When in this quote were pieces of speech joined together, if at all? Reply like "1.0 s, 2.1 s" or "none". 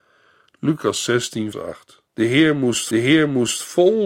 1.5 s, 2.1 s, 2.9 s